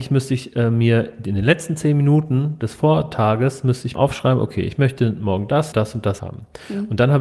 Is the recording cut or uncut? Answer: cut